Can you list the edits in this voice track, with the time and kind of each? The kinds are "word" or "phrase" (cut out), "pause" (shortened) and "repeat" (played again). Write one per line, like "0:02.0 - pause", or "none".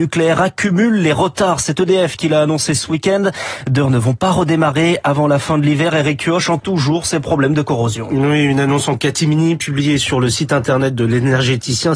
0:03.8 - word
0:06.6 - word